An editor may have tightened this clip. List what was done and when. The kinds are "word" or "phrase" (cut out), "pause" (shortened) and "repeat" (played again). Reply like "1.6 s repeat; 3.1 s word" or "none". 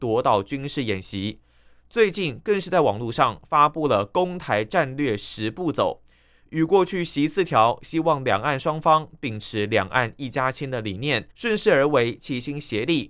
11.3 s pause

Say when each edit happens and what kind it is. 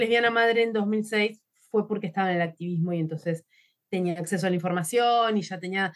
none

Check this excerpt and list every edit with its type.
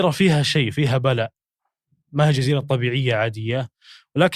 none

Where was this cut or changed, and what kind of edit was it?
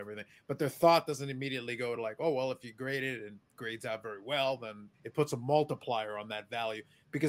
4.9 s pause

